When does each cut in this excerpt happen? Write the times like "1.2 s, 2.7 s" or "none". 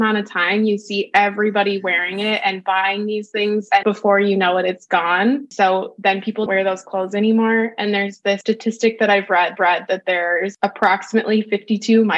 3.8 s, 6.5 s, 9.6 s